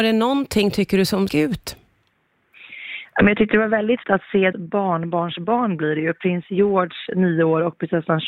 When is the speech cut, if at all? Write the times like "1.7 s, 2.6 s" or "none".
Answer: 1.3 s, 4.0 s, 4.5 s